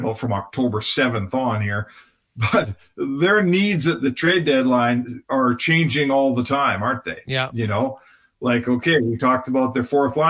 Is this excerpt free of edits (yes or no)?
yes